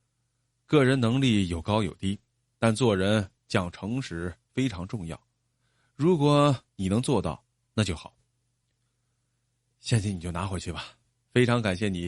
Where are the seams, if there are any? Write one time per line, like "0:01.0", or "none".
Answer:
none

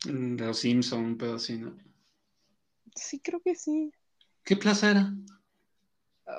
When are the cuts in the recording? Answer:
none

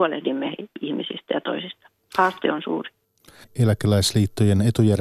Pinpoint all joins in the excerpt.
0:01.4
0:03.4

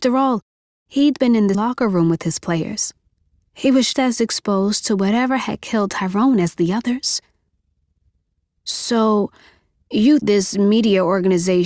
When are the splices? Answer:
0:01.5
0:03.9
0:10.2

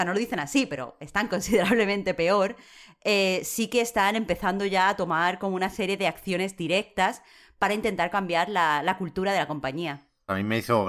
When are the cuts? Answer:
none

